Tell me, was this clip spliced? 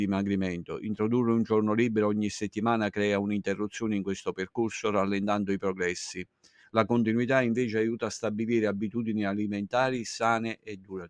no; 0 cuts

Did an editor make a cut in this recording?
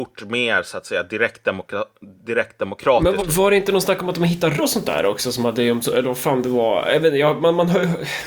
yes; 3 cuts; at 2.2 s, 3.2 s, 4.6 s

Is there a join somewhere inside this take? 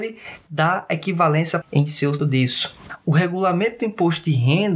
yes; 2 cuts; at 1.6 s, 2.2 s

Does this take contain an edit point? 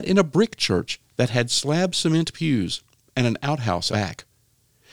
yes; 1 cut; at 3.9 s

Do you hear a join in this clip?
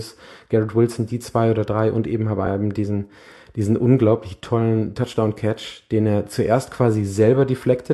no; 0 cuts

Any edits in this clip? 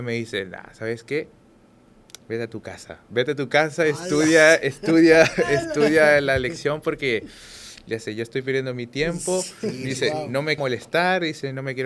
yes; 1 cut; at 10.6 s

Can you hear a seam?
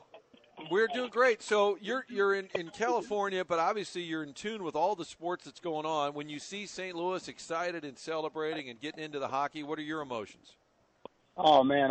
no; 0 cuts

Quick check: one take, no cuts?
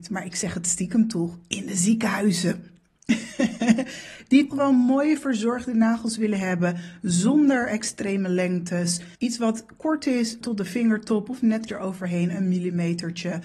no; 4 cuts; at 4.5 s, 9.1 s, 10.4 s, 11.7 s

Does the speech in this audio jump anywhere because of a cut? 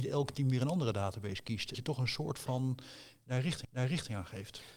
yes; 2 cuts; at 1.7 s, 3.6 s

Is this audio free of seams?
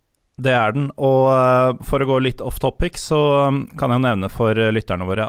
yes; 0 cuts

